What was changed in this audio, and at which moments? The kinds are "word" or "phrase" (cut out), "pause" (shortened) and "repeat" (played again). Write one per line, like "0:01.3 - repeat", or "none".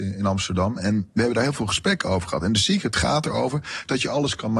none